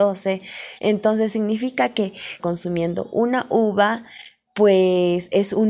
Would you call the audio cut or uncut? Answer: cut